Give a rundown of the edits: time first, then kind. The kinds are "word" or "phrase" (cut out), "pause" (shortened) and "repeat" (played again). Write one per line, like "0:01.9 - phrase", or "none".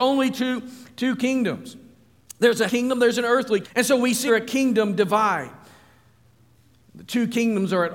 0:02.7 - word
0:03.6 - word
0:04.3 - word